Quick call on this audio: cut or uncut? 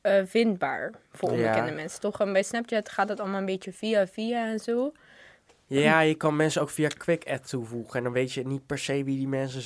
uncut